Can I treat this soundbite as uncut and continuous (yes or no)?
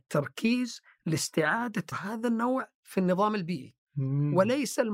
no